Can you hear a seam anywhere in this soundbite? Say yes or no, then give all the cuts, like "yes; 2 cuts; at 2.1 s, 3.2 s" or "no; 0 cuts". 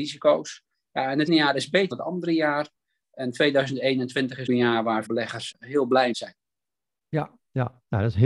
yes; 6 cuts; at 1.3 s, 1.9 s, 4.5 s, 5.0 s, 5.5 s, 6.1 s